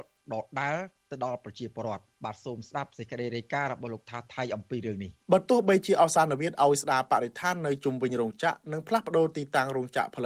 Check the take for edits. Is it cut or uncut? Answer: cut